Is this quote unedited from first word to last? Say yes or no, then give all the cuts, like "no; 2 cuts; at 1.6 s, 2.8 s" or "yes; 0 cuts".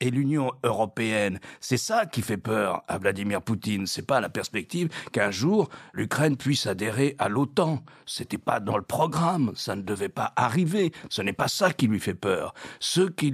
yes; 0 cuts